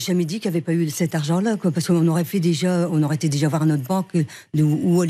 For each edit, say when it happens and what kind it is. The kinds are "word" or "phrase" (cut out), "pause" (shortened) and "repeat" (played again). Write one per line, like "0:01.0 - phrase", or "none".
none